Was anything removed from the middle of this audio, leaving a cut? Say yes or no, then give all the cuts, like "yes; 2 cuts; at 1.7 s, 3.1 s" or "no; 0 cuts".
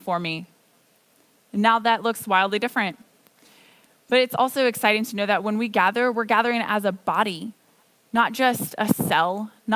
no; 0 cuts